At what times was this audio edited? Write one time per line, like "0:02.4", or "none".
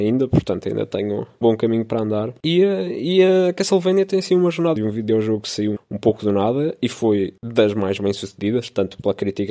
0:01.4
0:04.8
0:05.8